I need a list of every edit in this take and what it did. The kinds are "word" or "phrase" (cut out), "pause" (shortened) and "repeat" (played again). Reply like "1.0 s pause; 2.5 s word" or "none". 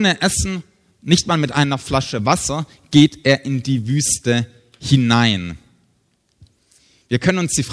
none